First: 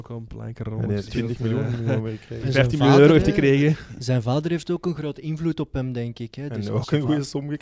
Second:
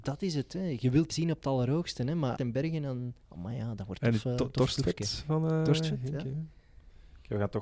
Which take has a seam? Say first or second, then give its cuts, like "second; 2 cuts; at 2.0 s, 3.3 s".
second; 4 cuts; at 1.1 s, 2.4 s, 3.2 s, 4.0 s